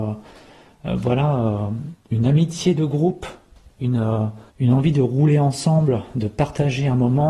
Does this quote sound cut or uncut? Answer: cut